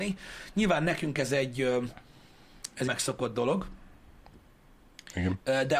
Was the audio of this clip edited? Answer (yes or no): yes